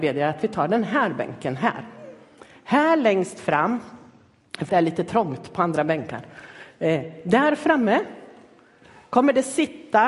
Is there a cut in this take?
yes; 1 cut; at 4.7 s

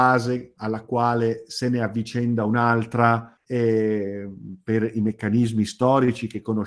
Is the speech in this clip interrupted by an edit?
yes; 1 cut; at 3.4 s

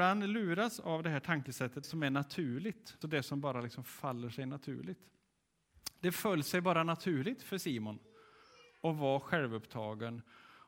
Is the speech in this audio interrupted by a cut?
yes; 2 cuts; at 1.8 s, 3.0 s

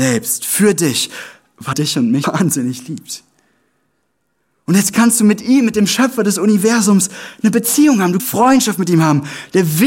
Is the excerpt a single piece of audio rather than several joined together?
no; 3 cuts; at 1.7 s, 2.2 s, 8.2 s

